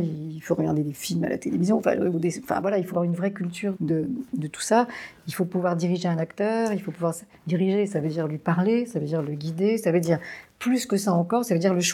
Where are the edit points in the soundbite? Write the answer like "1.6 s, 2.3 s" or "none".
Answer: 2.9 s, 3.7 s